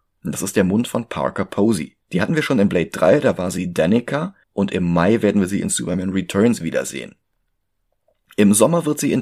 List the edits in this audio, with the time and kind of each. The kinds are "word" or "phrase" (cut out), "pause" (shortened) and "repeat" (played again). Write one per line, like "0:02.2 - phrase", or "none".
0:02.0 - pause
0:04.4 - pause

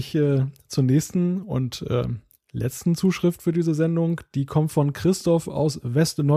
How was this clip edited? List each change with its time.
none

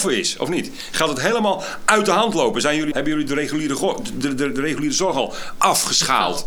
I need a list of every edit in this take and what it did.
0:02.9 - word

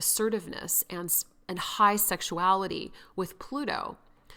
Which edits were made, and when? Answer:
none

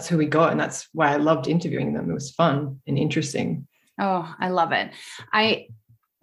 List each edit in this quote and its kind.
none

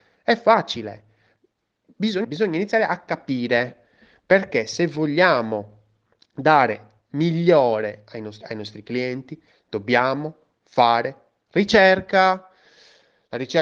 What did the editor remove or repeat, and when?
0:02.2 - word
0:07.0 - word
0:08.4 - word

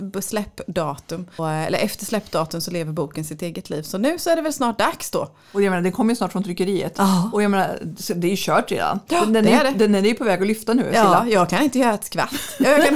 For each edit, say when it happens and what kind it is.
0:01.4 - word

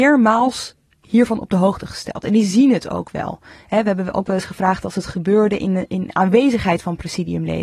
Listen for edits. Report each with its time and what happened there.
none

